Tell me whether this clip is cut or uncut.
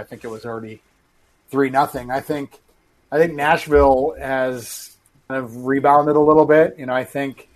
cut